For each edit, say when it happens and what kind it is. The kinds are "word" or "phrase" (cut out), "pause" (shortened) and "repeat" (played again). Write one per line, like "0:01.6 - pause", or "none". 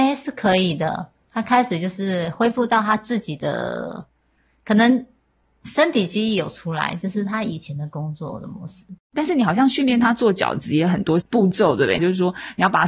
0:09.0 - pause

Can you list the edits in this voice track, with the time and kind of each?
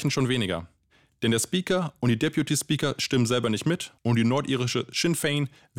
0:04.0 - pause

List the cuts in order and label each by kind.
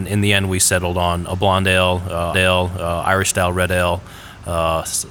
0:02.3 - repeat

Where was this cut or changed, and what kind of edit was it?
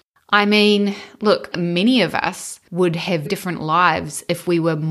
0:01.5 - phrase
0:02.7 - pause
0:03.2 - word

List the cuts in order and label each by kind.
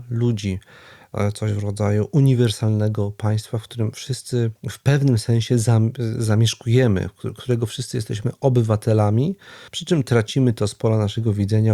0:04.6 - pause
0:09.7 - pause

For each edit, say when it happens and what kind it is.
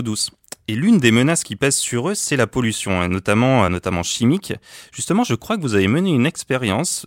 0:03.7 - word

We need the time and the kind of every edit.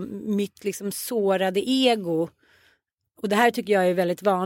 none

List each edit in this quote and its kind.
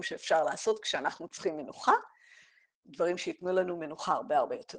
none

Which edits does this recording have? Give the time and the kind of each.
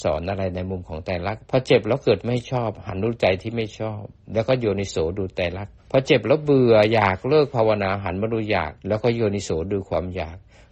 0:01.4 - pause
0:05.8 - pause
0:08.8 - pause

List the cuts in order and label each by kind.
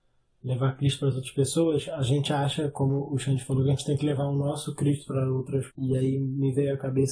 0:05.7 - word

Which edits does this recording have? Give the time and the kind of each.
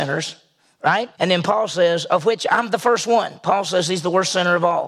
0:01.1 - pause

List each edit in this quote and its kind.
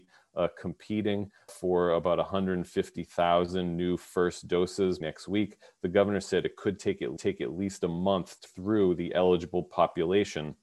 0:01.5 - word
0:05.0 - word
0:07.2 - repeat
0:08.5 - word

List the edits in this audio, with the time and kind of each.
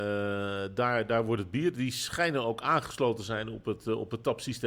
none

